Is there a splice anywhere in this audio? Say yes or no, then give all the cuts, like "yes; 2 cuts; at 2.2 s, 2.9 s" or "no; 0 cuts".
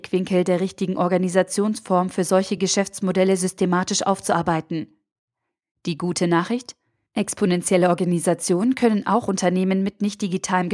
no; 0 cuts